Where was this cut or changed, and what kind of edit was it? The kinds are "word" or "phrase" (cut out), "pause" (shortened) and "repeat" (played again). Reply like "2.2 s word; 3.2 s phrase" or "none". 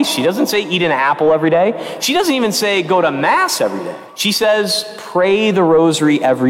4.1 s pause